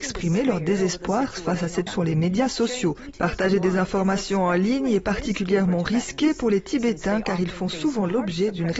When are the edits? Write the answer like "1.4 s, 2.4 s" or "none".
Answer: 1.9 s